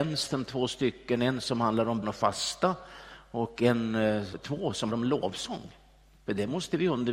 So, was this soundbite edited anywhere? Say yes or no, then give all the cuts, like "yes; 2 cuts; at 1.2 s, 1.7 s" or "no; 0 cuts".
yes; 3 cuts; at 2.0 s, 4.3 s, 4.9 s